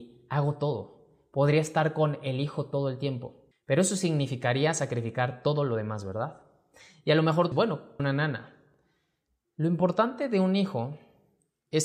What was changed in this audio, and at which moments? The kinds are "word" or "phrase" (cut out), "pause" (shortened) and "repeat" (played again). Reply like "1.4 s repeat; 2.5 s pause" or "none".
3.5 s pause; 7.5 s word; 8.0 s word